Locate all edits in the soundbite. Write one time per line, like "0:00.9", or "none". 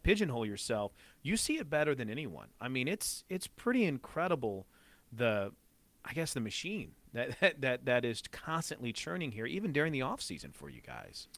none